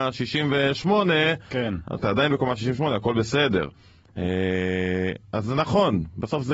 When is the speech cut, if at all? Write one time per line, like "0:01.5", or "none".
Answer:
0:02.0

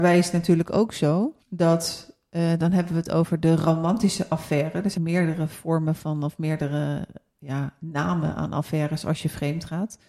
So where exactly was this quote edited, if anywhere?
0:01.4
0:05.0
0:07.3

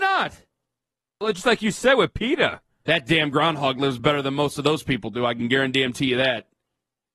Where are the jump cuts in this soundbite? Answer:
none

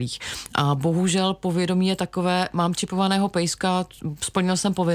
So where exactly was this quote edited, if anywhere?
none

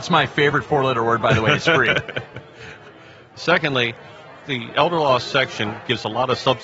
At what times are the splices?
none

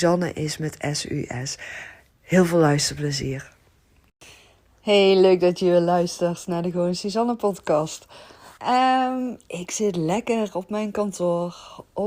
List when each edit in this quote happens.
0:08.6

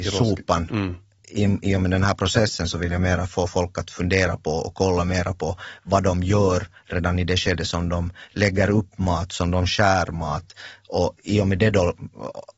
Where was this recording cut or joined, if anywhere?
none

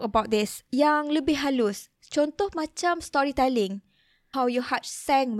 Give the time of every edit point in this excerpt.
0:04.3

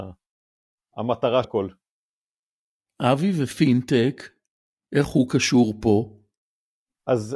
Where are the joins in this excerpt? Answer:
0:01.4

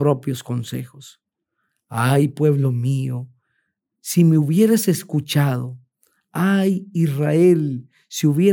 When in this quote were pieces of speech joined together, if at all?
none

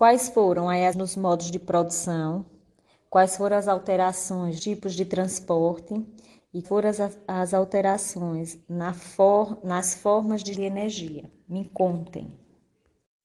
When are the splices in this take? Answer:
0:00.9
0:04.6
0:06.6
0:10.5

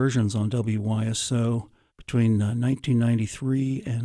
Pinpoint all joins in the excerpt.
0:01.9

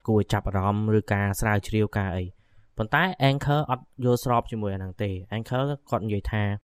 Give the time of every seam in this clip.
none

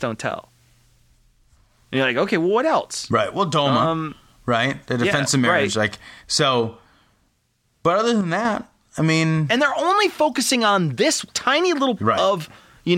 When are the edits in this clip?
0:06.2
0:12.0

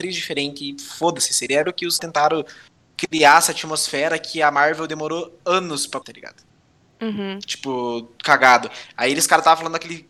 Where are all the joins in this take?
0:01.6
0:02.0
0:06.0

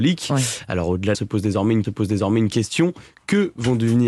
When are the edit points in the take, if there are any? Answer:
0:01.1
0:01.8

